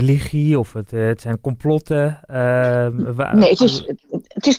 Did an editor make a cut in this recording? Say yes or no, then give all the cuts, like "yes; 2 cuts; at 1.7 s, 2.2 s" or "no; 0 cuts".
no; 0 cuts